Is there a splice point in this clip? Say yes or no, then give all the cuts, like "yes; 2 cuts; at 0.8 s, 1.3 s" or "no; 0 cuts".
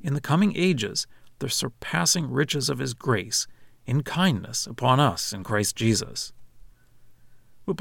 no; 0 cuts